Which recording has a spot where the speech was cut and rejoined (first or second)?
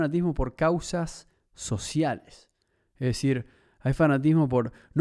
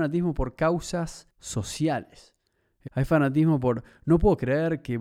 second